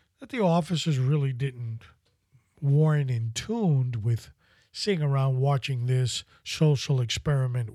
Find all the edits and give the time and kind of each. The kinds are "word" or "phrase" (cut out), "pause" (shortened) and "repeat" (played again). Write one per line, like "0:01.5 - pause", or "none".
none